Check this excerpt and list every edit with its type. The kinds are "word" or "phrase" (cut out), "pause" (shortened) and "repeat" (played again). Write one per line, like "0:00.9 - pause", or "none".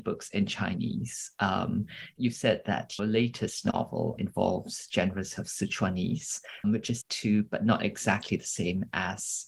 0:02.2 - word
0:03.0 - word
0:04.2 - word
0:05.4 - word
0:06.6 - word
0:07.0 - word